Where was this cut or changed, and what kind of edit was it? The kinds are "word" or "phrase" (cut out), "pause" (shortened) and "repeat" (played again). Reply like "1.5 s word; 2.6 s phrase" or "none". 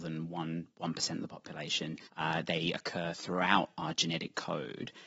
2.0 s pause